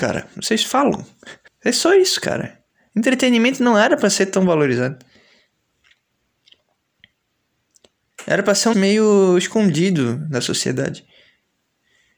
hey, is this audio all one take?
no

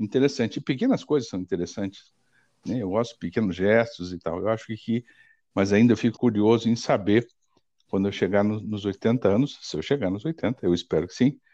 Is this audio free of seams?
no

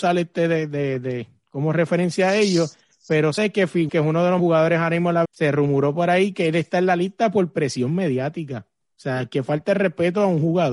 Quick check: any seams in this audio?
yes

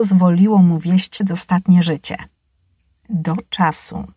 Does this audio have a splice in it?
yes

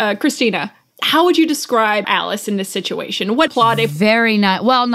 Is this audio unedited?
no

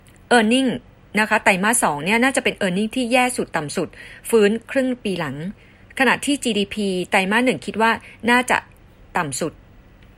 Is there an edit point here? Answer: no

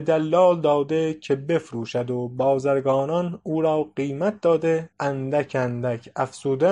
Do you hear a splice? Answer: yes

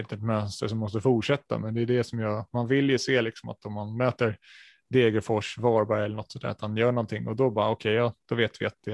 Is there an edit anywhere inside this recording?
no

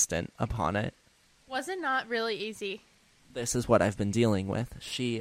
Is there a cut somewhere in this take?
no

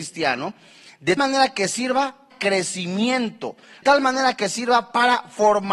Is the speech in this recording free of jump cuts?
no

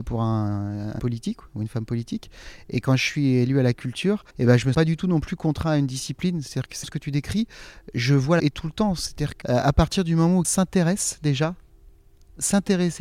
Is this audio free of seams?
no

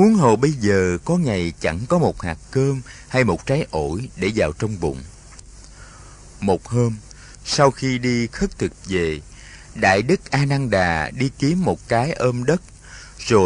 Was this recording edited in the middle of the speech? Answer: no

